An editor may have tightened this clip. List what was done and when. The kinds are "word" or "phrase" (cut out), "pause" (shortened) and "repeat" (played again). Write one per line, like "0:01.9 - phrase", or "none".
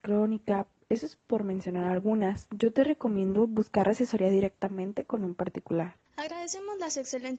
0:06.1 - pause